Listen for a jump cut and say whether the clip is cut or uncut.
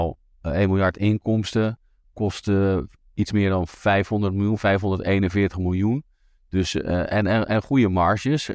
uncut